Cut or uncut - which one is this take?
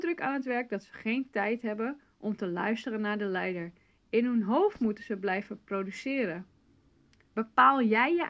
uncut